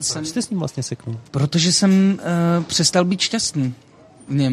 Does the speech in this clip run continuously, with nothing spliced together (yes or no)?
no